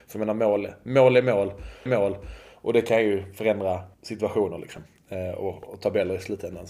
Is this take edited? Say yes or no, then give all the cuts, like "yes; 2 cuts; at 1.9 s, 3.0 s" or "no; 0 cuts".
yes; 3 cuts; at 1.9 s, 3.9 s, 5.7 s